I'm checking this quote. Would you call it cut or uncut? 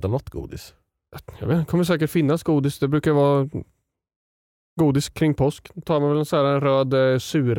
uncut